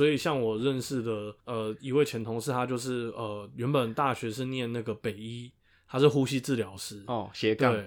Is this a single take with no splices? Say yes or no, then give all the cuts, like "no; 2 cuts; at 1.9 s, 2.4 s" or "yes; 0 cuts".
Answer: no; 1 cut; at 1.4 s